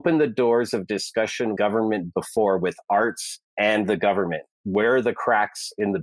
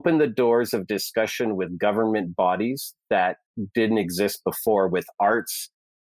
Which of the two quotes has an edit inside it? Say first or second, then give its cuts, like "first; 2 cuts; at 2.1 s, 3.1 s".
first; 3 cuts; at 1.6 s, 2.1 s, 3.4 s